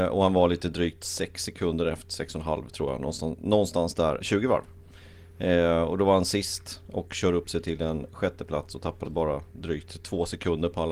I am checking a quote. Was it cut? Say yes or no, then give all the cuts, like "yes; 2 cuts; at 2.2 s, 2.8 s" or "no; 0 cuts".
yes; 2 cuts; at 4.2 s, 9.0 s